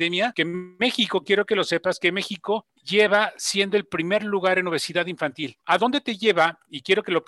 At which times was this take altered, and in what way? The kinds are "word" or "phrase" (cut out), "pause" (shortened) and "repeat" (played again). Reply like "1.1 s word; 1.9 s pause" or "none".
none